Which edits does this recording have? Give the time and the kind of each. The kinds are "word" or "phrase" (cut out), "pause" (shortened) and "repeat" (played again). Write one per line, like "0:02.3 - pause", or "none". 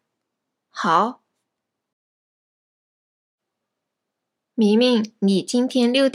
none